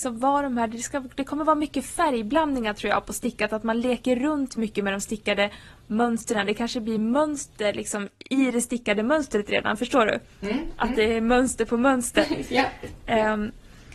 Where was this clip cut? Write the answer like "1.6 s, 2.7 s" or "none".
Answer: none